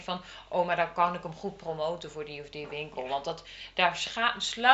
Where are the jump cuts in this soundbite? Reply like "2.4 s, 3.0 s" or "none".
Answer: none

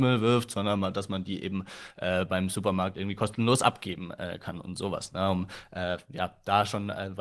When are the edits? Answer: none

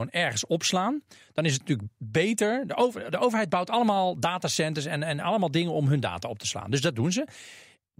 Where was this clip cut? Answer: none

